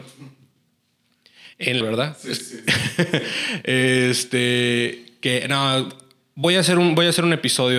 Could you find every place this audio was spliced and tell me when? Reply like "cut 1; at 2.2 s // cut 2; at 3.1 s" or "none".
cut 1; at 1.8 s